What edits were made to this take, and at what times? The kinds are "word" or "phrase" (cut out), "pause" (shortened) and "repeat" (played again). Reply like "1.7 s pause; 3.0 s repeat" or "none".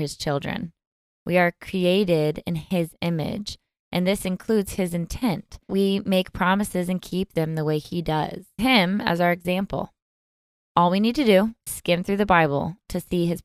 5.7 s word; 8.6 s word; 11.7 s word